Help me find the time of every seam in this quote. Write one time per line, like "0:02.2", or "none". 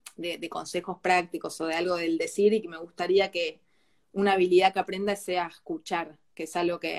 none